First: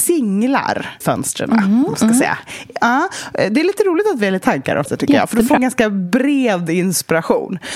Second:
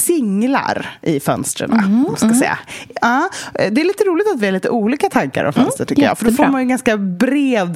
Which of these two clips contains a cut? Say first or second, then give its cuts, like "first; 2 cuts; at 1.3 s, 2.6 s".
first; 4 cuts; at 1.0 s, 4.4 s, 4.9 s, 5.6 s